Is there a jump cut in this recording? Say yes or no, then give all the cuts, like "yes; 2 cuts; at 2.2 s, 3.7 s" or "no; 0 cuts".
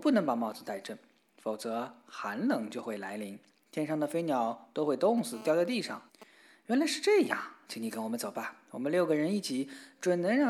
yes; 1 cut; at 6.1 s